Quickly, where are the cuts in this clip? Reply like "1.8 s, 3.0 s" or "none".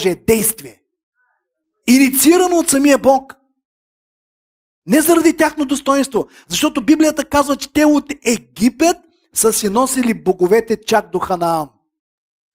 none

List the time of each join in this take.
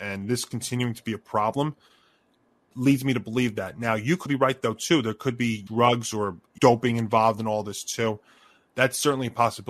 4.3 s, 5.7 s, 6.6 s

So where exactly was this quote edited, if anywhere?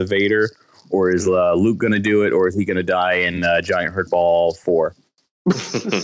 none

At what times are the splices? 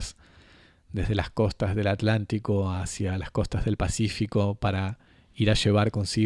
5.1 s

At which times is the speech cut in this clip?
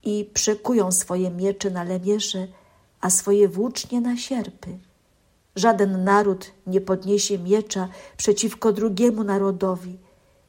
none

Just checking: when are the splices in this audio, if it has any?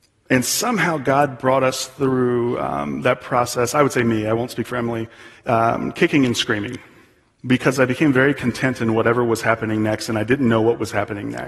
7.2 s

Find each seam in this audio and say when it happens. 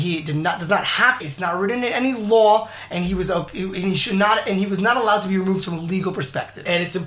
1.2 s

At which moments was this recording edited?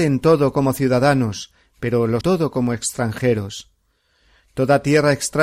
2.2 s

